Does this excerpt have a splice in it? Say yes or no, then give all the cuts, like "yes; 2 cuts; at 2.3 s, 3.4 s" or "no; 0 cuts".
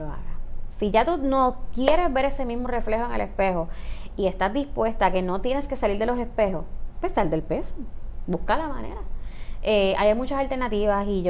no; 0 cuts